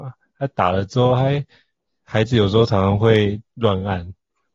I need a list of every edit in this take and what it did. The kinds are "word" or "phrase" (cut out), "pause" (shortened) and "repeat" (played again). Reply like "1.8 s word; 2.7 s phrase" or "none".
none